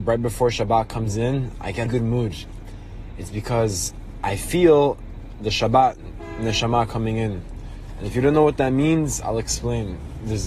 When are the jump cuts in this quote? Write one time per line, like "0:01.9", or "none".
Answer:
0:01.9